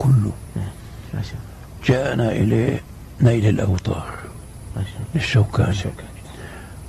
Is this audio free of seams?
yes; 0 cuts

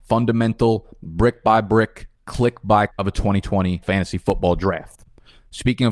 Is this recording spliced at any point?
yes; 2 cuts; at 2.9 s, 3.8 s

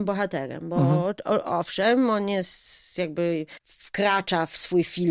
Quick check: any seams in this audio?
yes; 1 cut; at 3.6 s

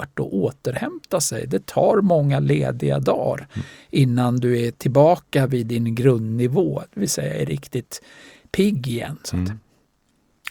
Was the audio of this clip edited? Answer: no; 0 cuts

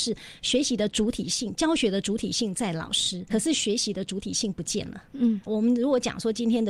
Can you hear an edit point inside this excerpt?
yes; 2 cuts; at 3.3 s, 5.5 s

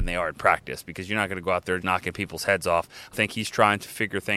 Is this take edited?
yes; 2 cuts; at 1.8 s, 3.1 s

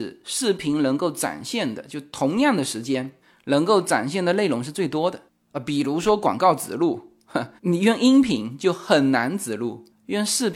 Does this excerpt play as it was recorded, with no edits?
no; 2 cuts; at 3.2 s, 7.6 s

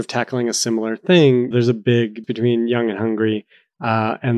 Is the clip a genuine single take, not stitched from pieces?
no; 2 cuts; at 1.5 s, 2.2 s

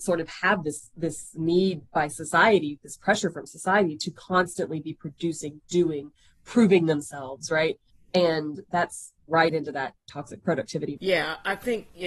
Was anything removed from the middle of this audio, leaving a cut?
yes; 2 cuts; at 9.3 s, 11.0 s

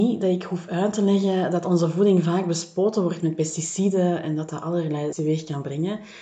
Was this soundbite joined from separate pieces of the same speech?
yes; 1 cut; at 5.1 s

